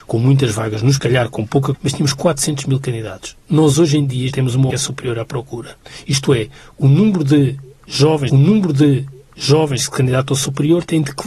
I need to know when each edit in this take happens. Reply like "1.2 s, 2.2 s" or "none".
1.0 s, 1.7 s, 4.3 s, 4.7 s, 8.3 s

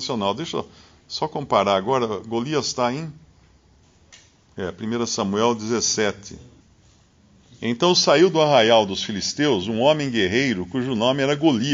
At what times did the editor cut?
none

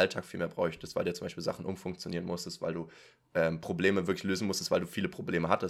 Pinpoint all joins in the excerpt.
none

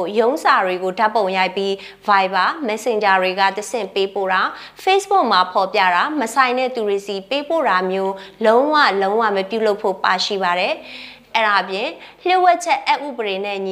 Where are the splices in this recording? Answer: none

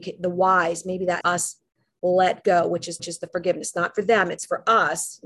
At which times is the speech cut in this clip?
1.2 s, 3.0 s

